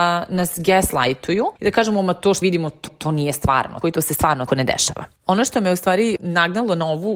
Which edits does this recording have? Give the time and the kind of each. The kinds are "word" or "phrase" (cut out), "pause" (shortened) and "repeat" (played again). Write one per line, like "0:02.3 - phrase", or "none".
0:01.6 - pause
0:02.4 - word
0:02.9 - repeat
0:03.8 - word
0:04.5 - word
0:05.2 - pause